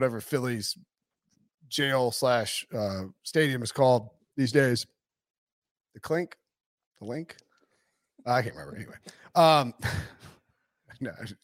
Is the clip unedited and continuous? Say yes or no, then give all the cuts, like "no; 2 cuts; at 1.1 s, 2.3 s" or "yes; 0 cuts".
yes; 0 cuts